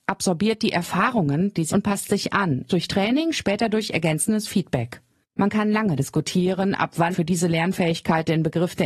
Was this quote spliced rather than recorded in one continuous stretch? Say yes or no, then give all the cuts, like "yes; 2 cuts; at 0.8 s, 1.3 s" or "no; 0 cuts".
yes; 4 cuts; at 1.7 s, 2.7 s, 6.0 s, 7.1 s